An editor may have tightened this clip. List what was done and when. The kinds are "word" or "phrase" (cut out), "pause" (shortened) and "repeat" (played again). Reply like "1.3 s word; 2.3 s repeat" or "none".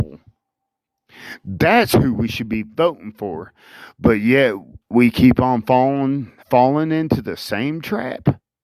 4.8 s pause; 6.4 s pause